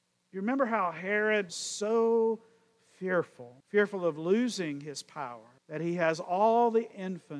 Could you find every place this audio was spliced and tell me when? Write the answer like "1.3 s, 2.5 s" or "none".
1.5 s, 3.6 s, 5.6 s